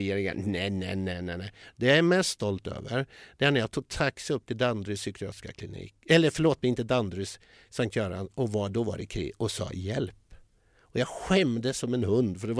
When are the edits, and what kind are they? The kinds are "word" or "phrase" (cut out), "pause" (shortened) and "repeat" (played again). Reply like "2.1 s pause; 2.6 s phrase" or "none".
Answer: none